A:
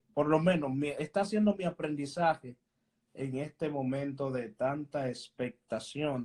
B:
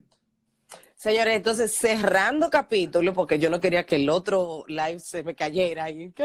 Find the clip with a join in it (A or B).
B